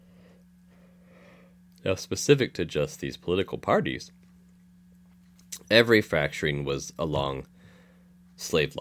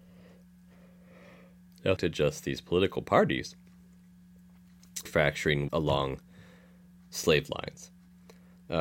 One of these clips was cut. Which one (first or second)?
second